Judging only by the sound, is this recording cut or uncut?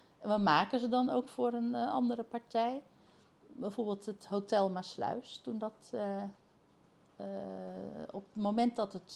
uncut